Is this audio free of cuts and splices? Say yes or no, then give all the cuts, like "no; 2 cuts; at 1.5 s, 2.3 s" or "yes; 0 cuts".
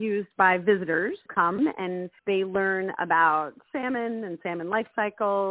no; 2 cuts; at 1.3 s, 2.2 s